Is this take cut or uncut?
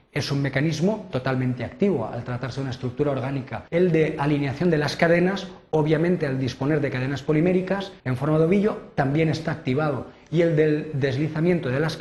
cut